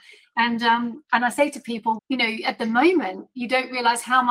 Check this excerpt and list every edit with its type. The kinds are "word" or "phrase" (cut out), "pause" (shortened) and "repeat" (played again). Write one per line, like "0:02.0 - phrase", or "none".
0:02.0 - word